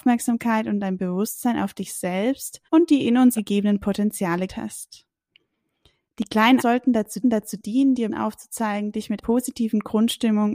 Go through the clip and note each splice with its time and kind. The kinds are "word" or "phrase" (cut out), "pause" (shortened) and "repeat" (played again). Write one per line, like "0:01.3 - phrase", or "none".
0:02.6 - pause
0:03.4 - word
0:04.5 - word
0:06.6 - word
0:07.2 - repeat
0:08.1 - word
0:09.2 - word